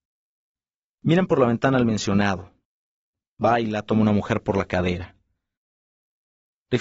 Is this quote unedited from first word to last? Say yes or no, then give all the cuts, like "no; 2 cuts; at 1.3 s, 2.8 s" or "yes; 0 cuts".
yes; 0 cuts